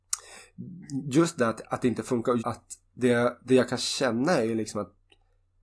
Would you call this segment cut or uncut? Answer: cut